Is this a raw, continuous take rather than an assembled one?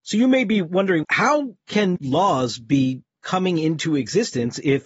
no; 2 cuts; at 1.0 s, 2.0 s

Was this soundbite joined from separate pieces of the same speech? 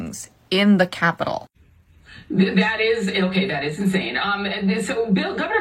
no; 0 cuts

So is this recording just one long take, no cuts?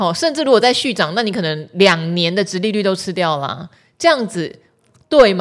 yes; 0 cuts

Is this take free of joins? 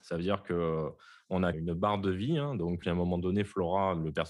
no; 2 cuts; at 1.5 s, 2.8 s

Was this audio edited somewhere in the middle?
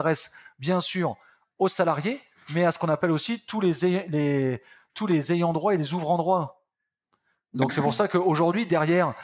no; 0 cuts

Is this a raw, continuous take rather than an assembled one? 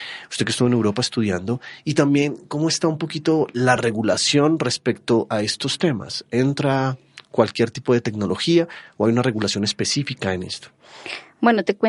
yes; 0 cuts

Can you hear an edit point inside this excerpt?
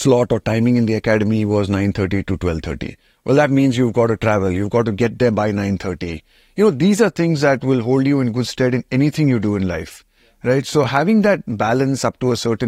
no; 0 cuts

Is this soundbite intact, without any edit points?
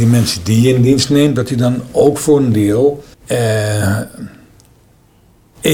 no; 1 cut; at 3.1 s

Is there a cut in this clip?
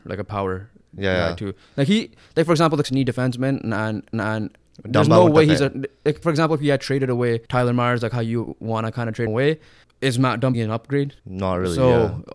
yes; 8 cuts; at 2.8 s, 4.1 s, 6.2 s, 7.5 s, 9.3 s, 9.8 s, 10.5 s, 11.2 s

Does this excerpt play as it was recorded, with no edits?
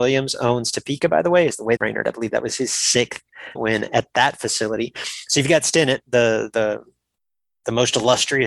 no; 2 cuts; at 1.8 s, 3.5 s

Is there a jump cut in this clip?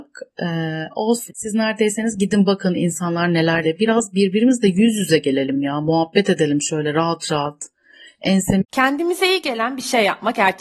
yes; 3 cuts; at 1.3 s, 3.6 s, 8.7 s

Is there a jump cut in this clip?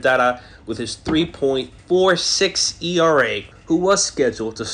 yes; 1 cut; at 3.5 s

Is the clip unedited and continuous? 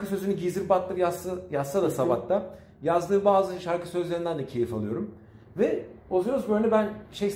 no; 1 cut; at 6.0 s

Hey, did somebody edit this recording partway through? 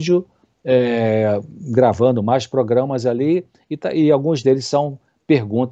no; 0 cuts

